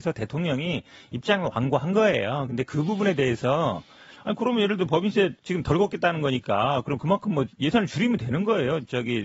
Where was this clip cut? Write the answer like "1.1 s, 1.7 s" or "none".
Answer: 5.4 s